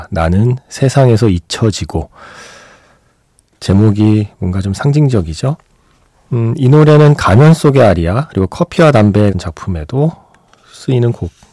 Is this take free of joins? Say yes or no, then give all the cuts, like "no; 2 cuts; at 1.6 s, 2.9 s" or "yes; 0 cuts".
no; 1 cut; at 9.3 s